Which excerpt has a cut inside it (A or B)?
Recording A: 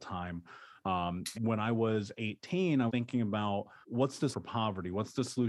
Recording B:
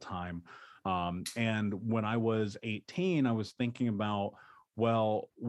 A